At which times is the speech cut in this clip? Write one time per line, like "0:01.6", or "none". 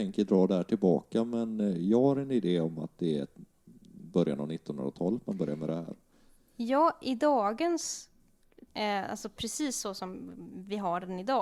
0:08.7